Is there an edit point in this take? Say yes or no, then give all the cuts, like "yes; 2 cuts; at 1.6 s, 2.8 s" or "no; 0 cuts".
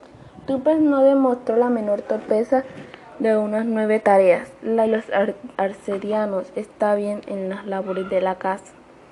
yes; 3 cuts; at 4.9 s, 5.5 s, 7.3 s